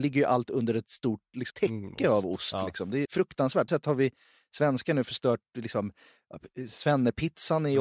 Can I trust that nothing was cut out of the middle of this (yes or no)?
no